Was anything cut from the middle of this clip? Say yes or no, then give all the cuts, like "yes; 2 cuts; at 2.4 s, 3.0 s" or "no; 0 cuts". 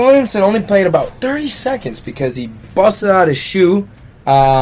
no; 0 cuts